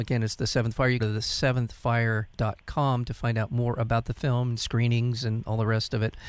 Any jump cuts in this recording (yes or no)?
yes